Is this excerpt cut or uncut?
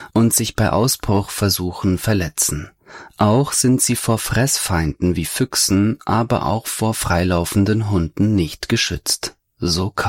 uncut